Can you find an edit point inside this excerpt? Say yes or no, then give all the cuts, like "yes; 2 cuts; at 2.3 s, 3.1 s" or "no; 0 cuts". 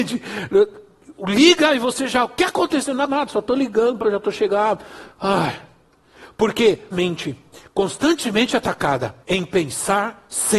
yes; 5 cuts; at 3.1 s, 4.0 s, 6.9 s, 7.5 s, 9.2 s